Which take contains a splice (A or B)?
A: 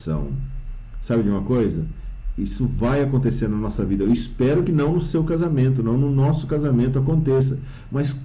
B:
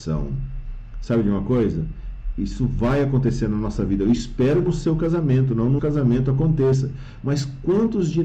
B